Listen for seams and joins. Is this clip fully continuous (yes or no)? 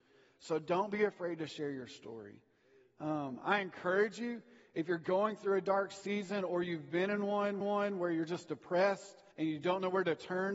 no